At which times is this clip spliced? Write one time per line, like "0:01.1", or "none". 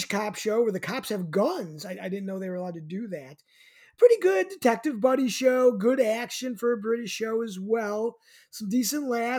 none